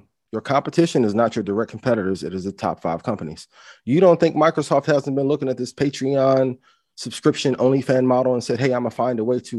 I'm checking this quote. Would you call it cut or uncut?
uncut